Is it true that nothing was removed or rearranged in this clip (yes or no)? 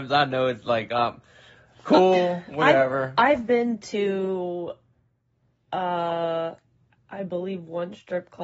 yes